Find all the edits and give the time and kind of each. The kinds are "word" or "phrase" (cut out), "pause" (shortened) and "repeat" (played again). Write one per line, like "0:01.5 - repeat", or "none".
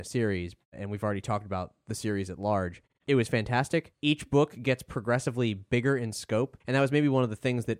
0:06.6 - pause

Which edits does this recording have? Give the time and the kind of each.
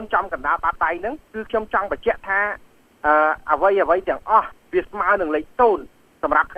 0:01.2 - pause

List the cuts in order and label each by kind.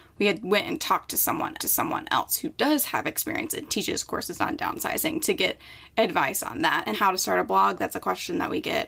0:01.6 - repeat
0:06.9 - word

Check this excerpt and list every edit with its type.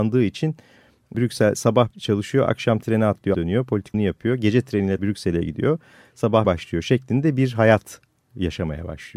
0:01.1 - word
0:01.9 - word
0:03.3 - word
0:03.9 - word
0:05.0 - word
0:06.4 - word

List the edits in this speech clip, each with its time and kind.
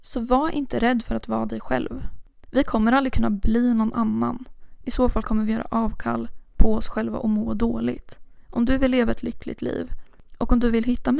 none

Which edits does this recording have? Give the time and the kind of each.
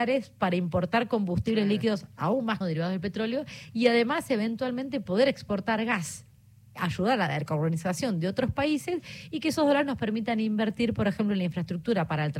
0:02.6 - phrase

